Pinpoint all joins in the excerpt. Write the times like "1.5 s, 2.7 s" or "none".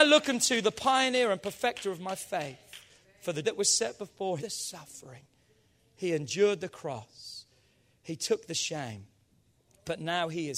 3.0 s, 3.4 s, 4.4 s